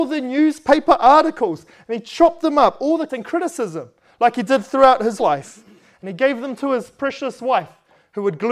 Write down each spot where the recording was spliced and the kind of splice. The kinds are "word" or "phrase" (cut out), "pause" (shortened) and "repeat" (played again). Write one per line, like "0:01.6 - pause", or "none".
0:03.1 - word
0:05.2 - word